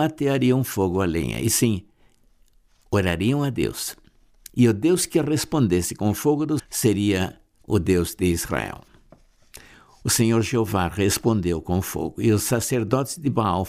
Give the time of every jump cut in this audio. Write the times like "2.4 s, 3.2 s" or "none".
6.6 s